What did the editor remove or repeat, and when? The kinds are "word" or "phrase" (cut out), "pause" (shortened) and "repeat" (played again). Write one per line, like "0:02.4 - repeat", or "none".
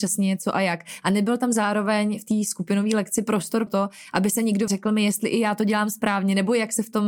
0:03.7 - word
0:04.7 - phrase

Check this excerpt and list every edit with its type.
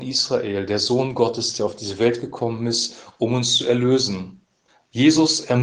0:04.7 - pause

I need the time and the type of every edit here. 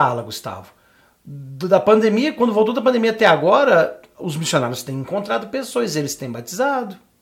none

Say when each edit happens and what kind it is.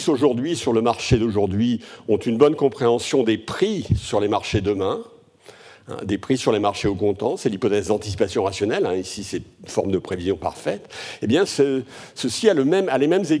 0:11.5 - word

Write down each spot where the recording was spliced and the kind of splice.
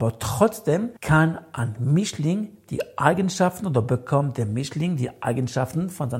0:01.0 - pause

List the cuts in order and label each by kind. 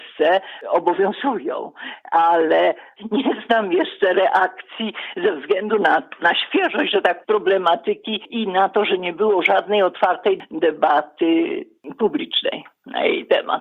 0:07.2 - phrase

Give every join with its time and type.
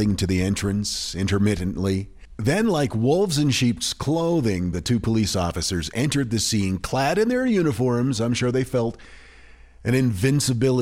none

